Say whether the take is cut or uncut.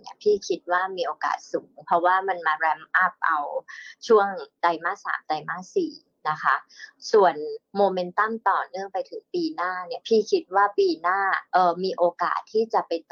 cut